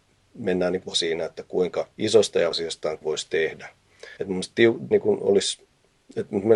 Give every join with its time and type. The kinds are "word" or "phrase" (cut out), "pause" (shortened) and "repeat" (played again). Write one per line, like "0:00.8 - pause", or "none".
0:00.9 - word
0:01.9 - pause
0:02.5 - word
0:03.0 - phrase
0:04.2 - pause
0:04.9 - word

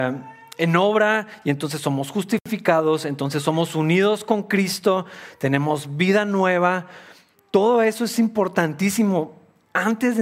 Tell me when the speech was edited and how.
none

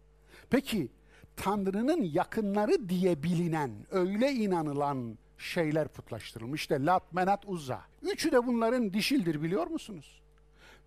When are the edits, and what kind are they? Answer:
0:05.2 - pause
0:07.9 - pause

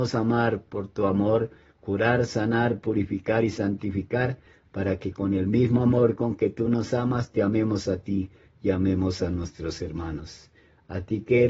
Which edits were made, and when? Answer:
none

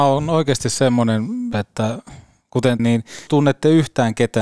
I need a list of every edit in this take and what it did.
0:01.5 - word
0:02.8 - word
0:03.3 - word

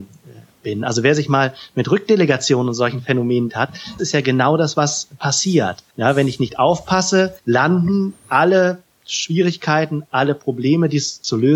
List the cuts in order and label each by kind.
0:03.5 - word
0:04.0 - word
0:05.9 - pause
0:07.4 - pause

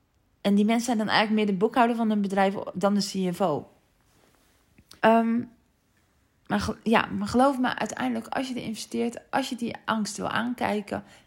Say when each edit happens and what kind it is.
0:05.0 - pause

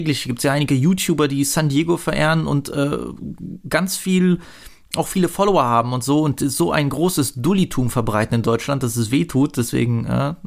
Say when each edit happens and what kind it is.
none

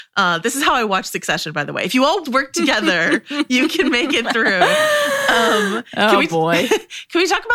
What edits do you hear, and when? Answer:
0:02.3 - word

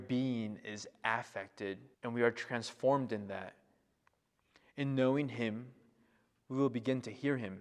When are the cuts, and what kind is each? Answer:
0:01.9 - pause

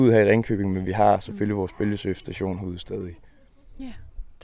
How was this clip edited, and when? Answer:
none

